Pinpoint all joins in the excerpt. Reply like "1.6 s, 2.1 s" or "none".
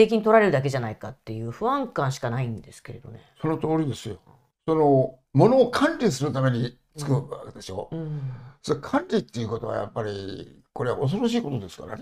4.5 s, 5.2 s, 10.7 s